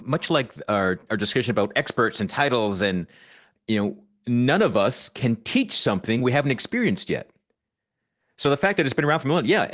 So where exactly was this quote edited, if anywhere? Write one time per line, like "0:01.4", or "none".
none

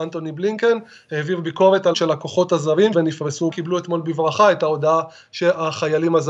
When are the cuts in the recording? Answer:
0:01.9
0:02.9
0:03.5

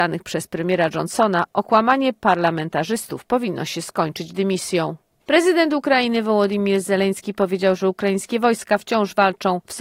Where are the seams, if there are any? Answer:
none

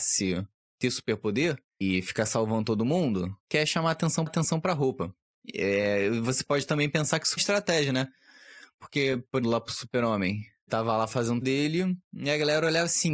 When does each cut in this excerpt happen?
0:03.4
0:04.3
0:07.4
0:09.4
0:10.7
0:11.4
0:12.0

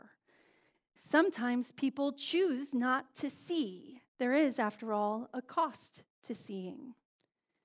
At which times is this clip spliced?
0:04.1

